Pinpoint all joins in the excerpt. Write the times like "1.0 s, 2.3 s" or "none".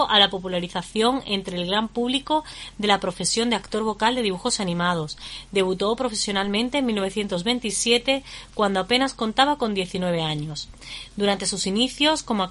none

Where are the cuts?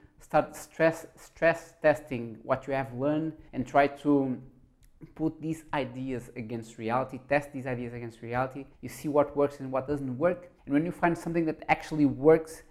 3.5 s, 8.7 s, 10.6 s

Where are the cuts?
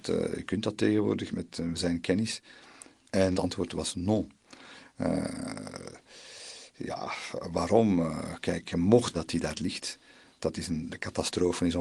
1.3 s, 3.3 s, 9.1 s, 9.5 s, 10.9 s

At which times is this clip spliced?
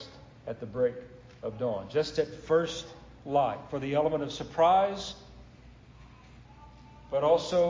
none

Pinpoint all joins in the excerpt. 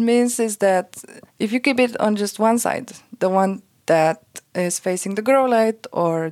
1.3 s

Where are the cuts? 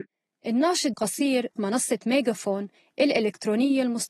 0.9 s, 1.6 s

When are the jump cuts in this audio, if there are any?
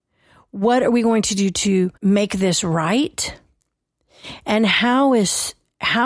2.0 s

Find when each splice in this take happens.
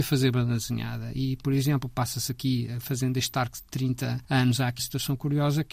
4.2 s, 4.8 s

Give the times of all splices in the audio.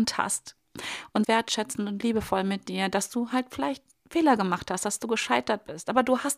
1.2 s

